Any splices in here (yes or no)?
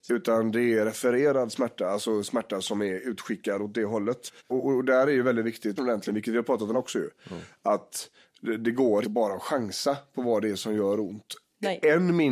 yes